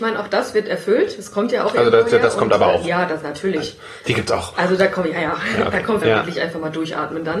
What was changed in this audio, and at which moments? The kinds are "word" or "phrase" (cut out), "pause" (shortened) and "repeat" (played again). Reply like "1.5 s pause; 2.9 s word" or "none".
6.0 s phrase